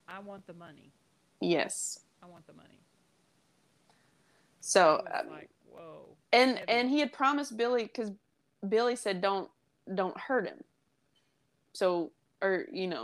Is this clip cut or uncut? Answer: uncut